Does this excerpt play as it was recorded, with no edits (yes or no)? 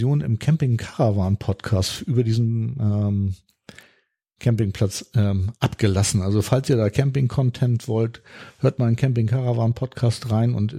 yes